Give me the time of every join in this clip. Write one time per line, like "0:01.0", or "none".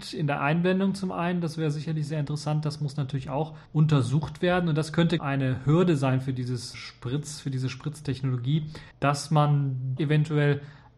0:03.7
0:05.2
0:06.7
0:08.9
0:10.0

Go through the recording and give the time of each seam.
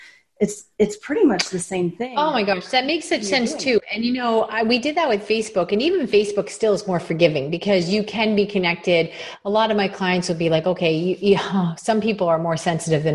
none

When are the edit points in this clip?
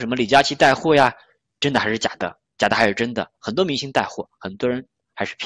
none

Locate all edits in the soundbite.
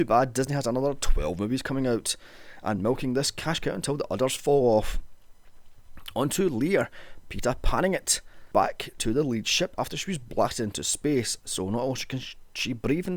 none

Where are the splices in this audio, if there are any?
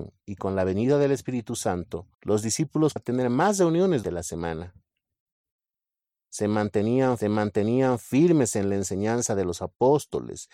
0:02.1
0:03.0
0:04.0
0:07.2

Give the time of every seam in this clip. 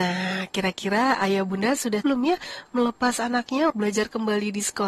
0:02.0
0:03.7

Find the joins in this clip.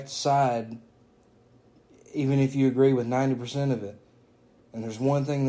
none

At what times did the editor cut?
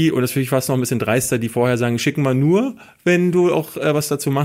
none

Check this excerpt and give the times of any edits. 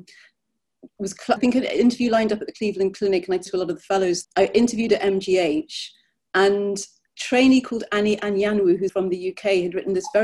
0:01.4
0:03.5
0:04.2
0:07.1
0:08.9

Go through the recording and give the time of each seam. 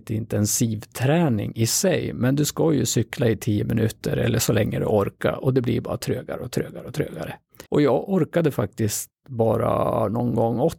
0:07.7

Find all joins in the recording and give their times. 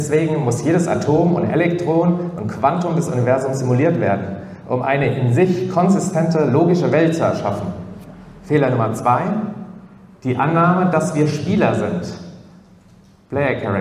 none

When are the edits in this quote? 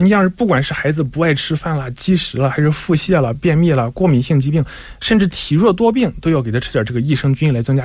none

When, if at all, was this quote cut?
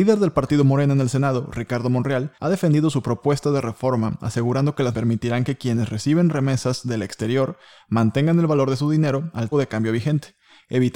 0:02.4
0:04.9
0:09.5

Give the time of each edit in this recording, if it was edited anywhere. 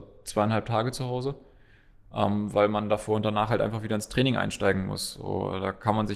none

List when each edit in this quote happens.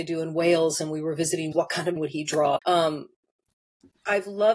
0:01.5
0:02.0
0:02.6

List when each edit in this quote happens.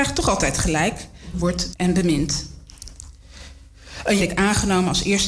0:01.3
0:01.7
0:04.2

